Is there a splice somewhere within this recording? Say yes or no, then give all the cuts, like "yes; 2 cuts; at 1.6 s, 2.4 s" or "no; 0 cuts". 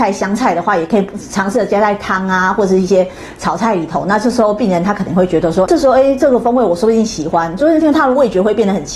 yes; 1 cut; at 5.7 s